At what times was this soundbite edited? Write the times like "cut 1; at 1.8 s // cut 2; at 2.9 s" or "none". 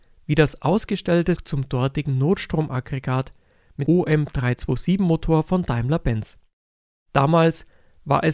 cut 1; at 1.4 s // cut 2; at 3.9 s